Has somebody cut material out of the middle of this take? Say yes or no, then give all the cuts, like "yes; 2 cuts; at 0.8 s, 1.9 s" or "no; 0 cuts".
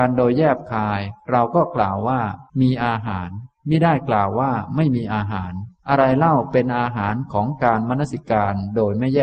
yes; 2 cuts; at 2.5 s, 5.8 s